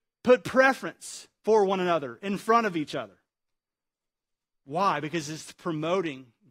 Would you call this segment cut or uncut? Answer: uncut